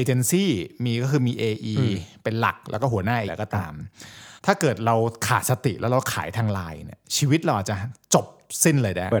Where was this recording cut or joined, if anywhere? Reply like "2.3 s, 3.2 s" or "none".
3.3 s, 4.4 s